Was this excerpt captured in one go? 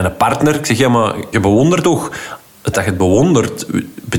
no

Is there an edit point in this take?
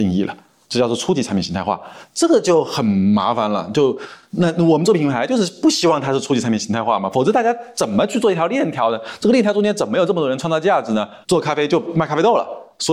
yes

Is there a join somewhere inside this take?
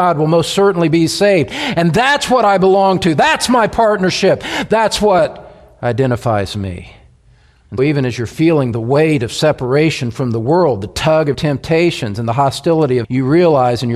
yes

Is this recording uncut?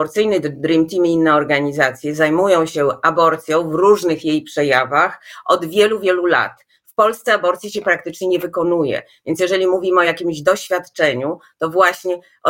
yes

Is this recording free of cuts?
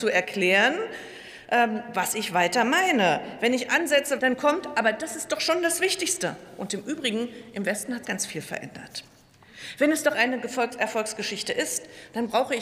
no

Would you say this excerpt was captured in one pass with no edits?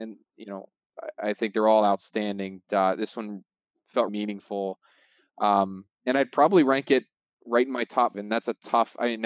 no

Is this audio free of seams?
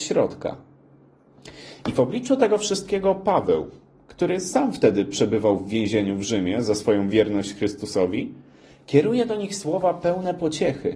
yes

